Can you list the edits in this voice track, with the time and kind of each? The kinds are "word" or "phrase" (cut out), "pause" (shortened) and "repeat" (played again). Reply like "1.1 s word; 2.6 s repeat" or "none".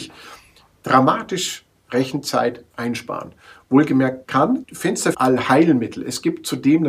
4.6 s word; 5.1 s phrase